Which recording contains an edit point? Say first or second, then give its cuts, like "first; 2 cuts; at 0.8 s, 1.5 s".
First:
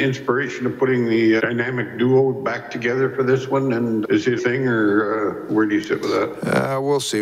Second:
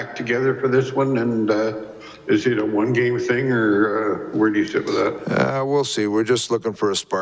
first; 3 cuts; at 1.4 s, 4.0 s, 4.4 s